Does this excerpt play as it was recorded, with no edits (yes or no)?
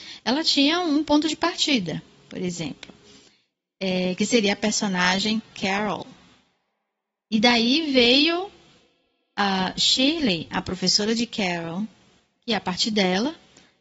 yes